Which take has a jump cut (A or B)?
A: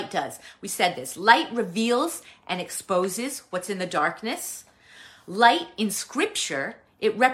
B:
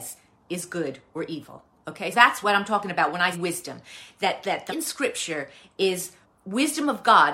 B